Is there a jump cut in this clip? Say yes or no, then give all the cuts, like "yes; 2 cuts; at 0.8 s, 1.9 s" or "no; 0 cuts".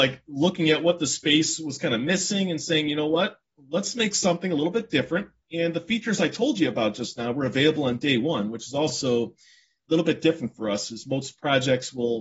no; 0 cuts